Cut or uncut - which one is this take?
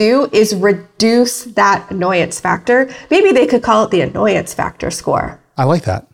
uncut